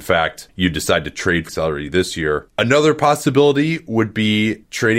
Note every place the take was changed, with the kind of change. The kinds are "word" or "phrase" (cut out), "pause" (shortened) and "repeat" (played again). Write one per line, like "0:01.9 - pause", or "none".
0:01.5 - phrase